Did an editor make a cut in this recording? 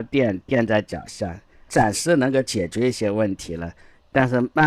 no; 0 cuts

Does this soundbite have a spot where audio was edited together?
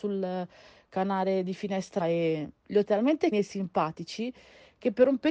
yes; 3 cuts; at 2.0 s, 2.8 s, 3.3 s

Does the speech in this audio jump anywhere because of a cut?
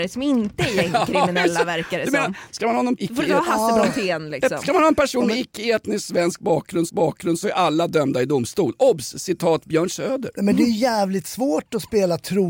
yes; 2 cuts; at 3.0 s, 6.9 s

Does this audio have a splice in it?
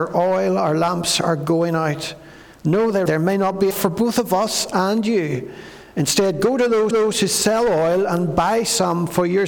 yes; 3 cuts; at 3.1 s, 3.7 s, 6.9 s

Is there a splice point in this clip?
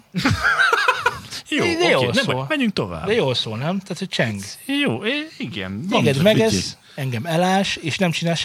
no; 0 cuts

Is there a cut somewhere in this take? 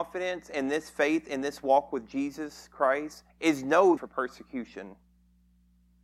yes; 2 cuts; at 3.3 s, 4.0 s

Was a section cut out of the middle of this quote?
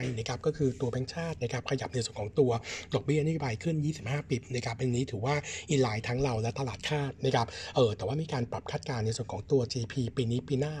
no; 0 cuts

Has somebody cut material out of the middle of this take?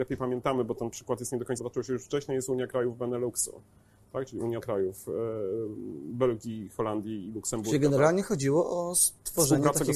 yes; 2 cuts; at 1.6 s, 4.6 s

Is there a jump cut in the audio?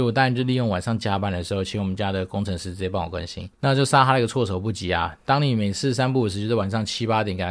yes; 1 cut; at 3.5 s

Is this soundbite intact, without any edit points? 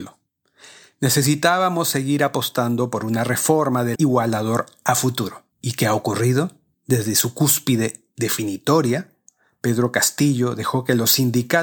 no; 3 cuts; at 3.9 s, 5.5 s, 6.7 s

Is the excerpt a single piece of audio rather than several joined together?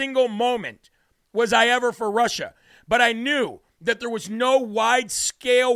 yes; 0 cuts

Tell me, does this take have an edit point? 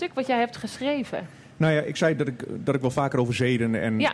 no; 0 cuts

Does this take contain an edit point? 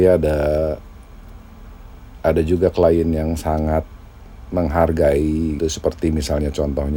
yes; 1 cut; at 5.6 s

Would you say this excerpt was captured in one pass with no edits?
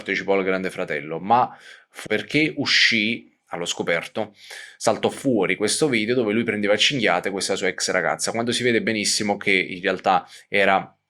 no; 1 cut; at 2.1 s

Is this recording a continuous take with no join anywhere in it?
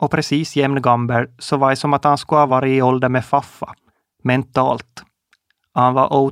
yes; 0 cuts

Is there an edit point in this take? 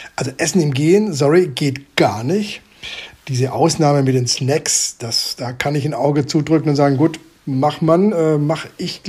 no; 0 cuts

